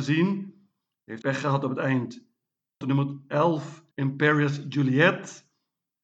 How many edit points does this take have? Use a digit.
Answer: 3